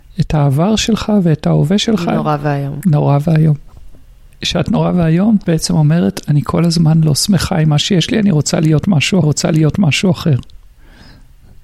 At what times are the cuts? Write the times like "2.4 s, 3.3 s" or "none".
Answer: 4.7 s, 5.4 s, 9.2 s